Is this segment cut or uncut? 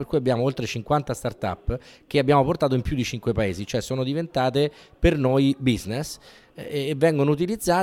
uncut